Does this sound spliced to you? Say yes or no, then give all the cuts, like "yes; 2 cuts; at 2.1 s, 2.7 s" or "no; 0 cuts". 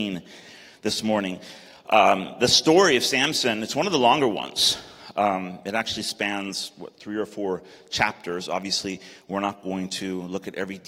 no; 0 cuts